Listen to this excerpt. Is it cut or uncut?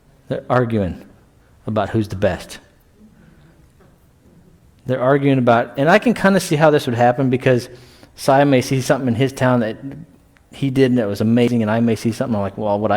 uncut